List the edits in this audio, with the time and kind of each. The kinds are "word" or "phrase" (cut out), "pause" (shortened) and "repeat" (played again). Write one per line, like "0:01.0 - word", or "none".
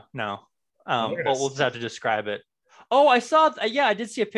none